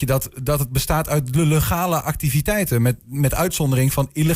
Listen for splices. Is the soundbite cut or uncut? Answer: uncut